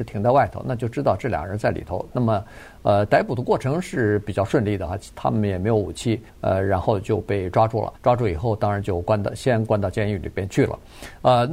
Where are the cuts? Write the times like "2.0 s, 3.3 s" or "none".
6.3 s, 8.0 s